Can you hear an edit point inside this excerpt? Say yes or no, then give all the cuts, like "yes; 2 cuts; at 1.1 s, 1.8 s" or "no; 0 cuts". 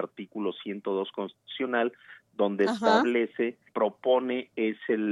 yes; 1 cut; at 3.7 s